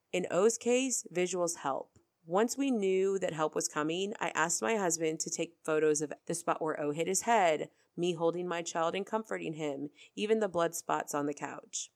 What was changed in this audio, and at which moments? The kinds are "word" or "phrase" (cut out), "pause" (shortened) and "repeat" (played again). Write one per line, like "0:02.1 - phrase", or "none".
0:06.2 - word